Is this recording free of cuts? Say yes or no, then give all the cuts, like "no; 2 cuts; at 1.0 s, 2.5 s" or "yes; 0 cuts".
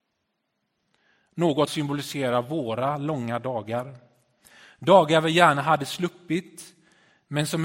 no; 1 cut; at 1.7 s